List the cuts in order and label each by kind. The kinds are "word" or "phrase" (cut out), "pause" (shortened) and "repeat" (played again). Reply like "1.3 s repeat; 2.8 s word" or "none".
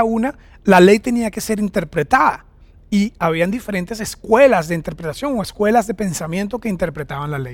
none